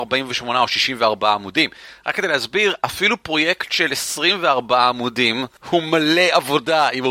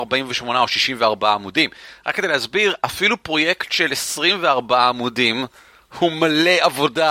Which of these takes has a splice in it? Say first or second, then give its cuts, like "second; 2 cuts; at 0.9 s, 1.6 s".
first; 1 cut; at 5.6 s